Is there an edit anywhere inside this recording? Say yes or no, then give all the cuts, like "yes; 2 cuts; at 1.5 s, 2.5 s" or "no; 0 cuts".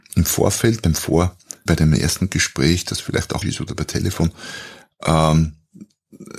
yes; 2 cuts; at 1.7 s, 3.4 s